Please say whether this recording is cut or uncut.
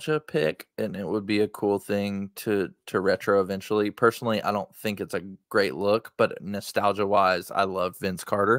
cut